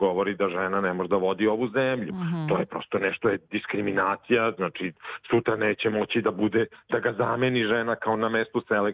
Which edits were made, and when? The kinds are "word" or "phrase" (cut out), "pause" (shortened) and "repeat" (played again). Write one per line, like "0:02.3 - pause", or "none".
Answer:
0:03.2 - word